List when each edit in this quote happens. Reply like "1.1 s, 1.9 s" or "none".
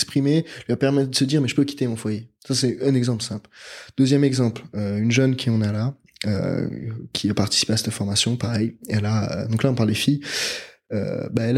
2.4 s